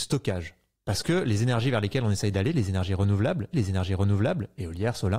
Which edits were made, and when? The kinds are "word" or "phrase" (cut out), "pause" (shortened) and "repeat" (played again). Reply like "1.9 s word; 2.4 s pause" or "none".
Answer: 3.5 s repeat